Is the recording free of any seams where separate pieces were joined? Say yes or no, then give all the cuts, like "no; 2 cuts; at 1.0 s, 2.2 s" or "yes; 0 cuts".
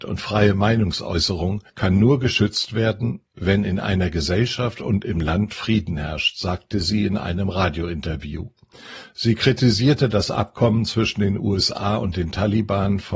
no; 1 cut; at 1.7 s